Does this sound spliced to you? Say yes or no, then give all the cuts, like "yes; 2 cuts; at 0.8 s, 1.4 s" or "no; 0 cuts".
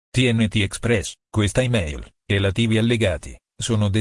yes; 2 cuts; at 1.2 s, 2.3 s